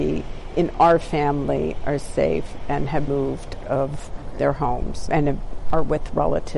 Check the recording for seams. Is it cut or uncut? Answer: cut